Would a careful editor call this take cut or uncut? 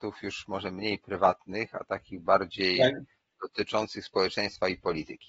uncut